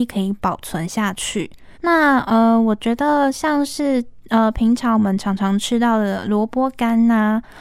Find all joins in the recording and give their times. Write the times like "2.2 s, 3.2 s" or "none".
1.7 s